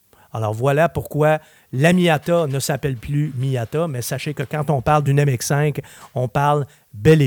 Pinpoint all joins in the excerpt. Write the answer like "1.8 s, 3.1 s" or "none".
none